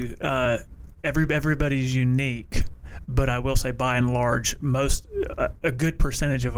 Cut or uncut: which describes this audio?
uncut